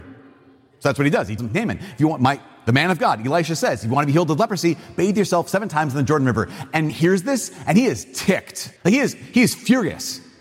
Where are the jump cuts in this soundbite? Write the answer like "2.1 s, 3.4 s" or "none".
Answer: 1.4 s, 6.9 s, 8.8 s